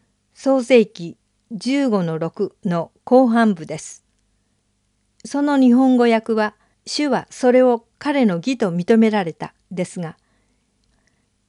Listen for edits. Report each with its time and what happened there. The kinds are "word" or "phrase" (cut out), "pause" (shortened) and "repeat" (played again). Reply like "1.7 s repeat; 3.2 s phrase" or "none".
6.7 s pause